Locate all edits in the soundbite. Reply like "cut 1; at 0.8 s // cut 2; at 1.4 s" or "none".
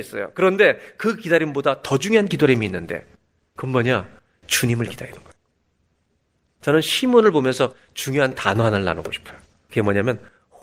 none